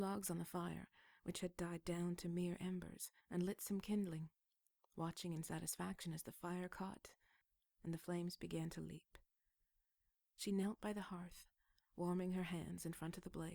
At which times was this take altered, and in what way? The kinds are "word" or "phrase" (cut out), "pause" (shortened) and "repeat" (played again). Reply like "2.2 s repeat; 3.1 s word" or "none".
3.2 s pause